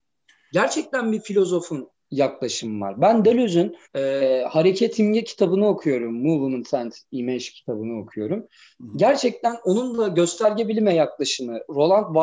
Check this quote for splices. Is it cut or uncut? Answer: cut